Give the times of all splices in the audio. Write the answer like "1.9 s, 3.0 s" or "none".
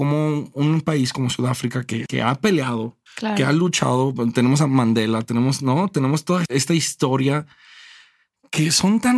2.1 s, 3.1 s, 6.4 s